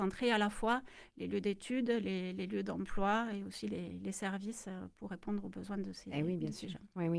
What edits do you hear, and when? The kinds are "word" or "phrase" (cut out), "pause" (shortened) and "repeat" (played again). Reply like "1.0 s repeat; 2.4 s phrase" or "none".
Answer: none